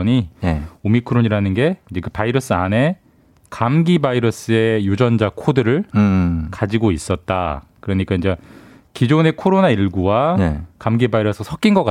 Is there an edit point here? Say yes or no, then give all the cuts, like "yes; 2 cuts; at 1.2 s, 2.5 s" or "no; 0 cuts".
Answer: no; 0 cuts